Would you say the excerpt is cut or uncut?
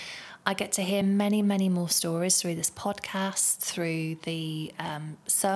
uncut